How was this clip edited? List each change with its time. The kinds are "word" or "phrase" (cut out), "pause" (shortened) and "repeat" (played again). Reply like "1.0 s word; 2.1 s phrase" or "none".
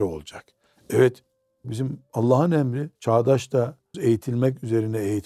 1.6 s word; 3.0 s pause; 3.9 s word